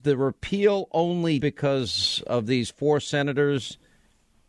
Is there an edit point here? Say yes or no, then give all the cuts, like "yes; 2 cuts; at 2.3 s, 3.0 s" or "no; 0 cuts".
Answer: yes; 1 cut; at 1.4 s